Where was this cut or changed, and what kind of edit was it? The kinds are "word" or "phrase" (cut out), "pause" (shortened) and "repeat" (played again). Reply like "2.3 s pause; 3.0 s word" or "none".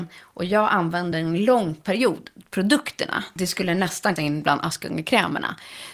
1.1 s word; 3.4 s word; 4.2 s phrase